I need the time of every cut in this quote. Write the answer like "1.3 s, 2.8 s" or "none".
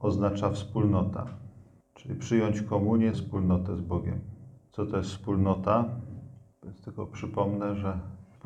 3.1 s